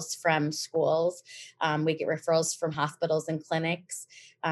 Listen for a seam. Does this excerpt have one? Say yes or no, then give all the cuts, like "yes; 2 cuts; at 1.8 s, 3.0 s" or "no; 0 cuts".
no; 0 cuts